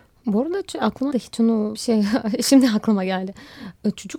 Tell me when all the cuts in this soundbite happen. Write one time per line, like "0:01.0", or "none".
0:01.1
0:01.7